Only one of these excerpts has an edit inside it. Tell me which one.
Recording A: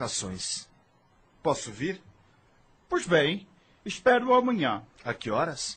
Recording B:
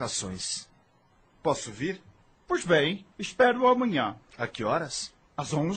B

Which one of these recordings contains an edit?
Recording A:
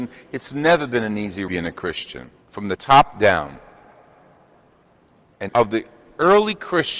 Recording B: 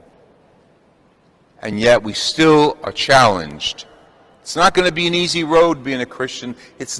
A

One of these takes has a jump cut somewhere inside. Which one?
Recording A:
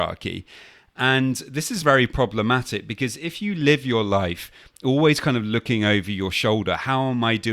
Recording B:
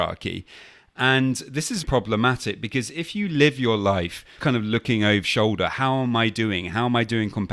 B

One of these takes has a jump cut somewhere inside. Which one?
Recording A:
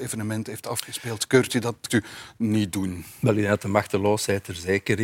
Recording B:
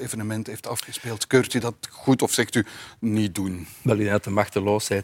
A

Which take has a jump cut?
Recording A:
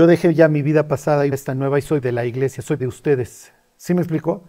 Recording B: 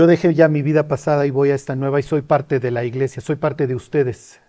A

